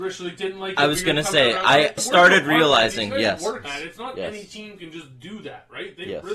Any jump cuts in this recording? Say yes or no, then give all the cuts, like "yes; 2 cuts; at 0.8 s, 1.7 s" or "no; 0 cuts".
yes; 2 cuts; at 2.0 s, 3.6 s